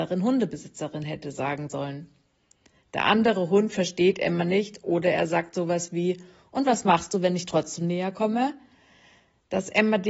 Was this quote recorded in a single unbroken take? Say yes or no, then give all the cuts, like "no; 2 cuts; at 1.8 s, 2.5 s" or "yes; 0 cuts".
yes; 0 cuts